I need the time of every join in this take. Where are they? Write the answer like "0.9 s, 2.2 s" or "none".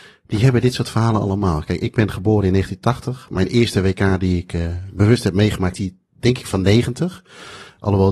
5.7 s